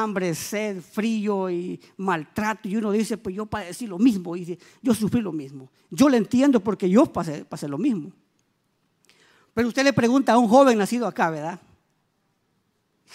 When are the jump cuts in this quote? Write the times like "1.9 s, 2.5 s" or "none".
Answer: none